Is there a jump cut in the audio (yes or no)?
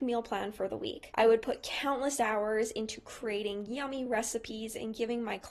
no